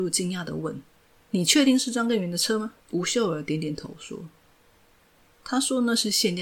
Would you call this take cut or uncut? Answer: cut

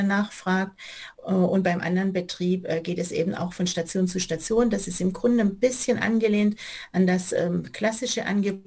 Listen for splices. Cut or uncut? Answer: cut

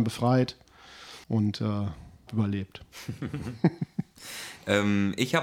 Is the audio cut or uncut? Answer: cut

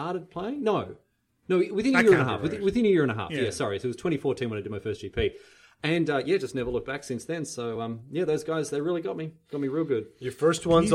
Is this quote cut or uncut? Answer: uncut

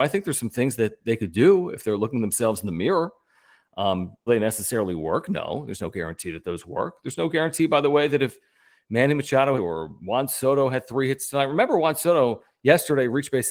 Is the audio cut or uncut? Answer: cut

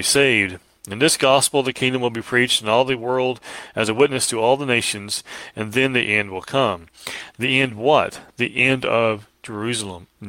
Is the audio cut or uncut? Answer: uncut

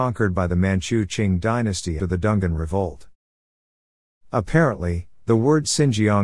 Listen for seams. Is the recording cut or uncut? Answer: cut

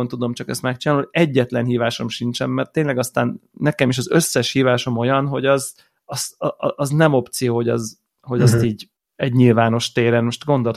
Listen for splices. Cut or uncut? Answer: uncut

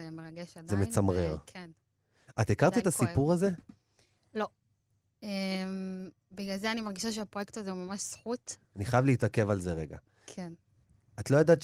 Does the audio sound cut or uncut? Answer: uncut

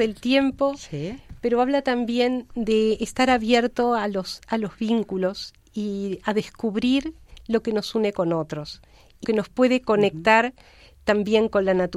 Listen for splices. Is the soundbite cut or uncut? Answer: cut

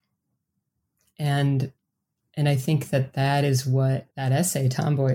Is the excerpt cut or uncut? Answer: cut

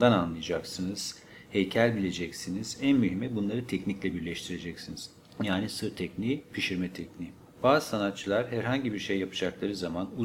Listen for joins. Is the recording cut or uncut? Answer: uncut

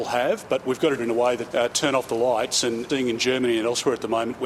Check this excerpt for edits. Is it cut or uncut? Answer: cut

